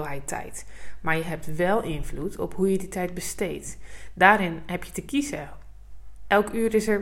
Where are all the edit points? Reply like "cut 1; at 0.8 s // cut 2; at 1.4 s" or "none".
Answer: none